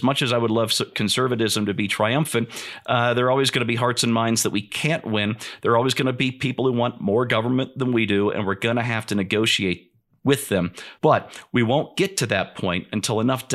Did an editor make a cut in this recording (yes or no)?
yes